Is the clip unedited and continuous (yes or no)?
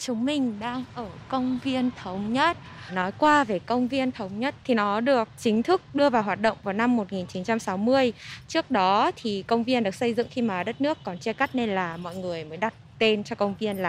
yes